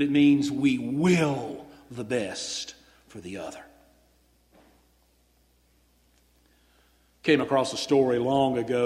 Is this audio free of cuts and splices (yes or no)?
yes